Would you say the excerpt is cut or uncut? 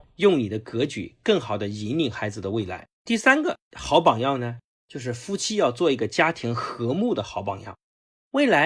cut